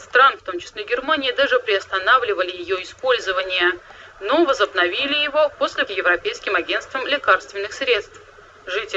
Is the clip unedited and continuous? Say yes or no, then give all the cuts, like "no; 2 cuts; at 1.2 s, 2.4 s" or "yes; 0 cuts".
no; 1 cut; at 5.9 s